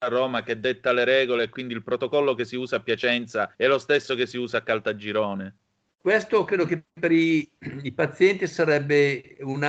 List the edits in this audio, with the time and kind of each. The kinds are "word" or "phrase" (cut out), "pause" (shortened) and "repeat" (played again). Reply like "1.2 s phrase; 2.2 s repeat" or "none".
3.5 s pause; 5.9 s pause